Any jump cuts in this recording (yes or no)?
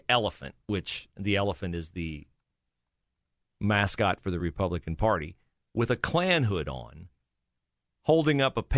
no